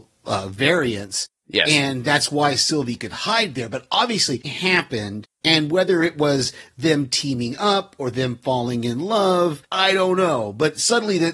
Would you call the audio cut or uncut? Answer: cut